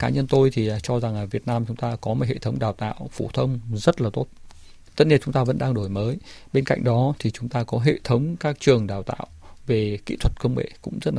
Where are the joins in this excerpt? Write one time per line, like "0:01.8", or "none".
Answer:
none